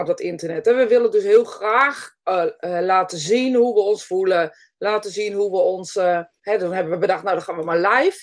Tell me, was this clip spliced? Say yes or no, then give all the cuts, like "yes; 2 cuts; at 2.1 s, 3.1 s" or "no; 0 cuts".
no; 0 cuts